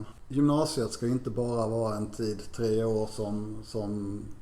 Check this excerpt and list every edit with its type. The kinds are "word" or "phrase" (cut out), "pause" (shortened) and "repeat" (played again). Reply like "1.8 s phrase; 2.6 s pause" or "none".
none